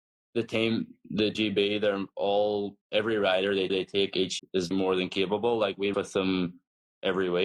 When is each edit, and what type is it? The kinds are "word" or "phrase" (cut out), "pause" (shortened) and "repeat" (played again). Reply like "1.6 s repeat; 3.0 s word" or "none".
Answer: 1.3 s word; 2.8 s pause; 3.7 s repeat; 4.4 s word; 4.7 s word; 5.9 s word